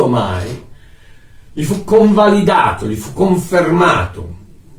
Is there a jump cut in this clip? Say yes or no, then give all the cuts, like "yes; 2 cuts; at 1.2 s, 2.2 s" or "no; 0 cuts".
no; 0 cuts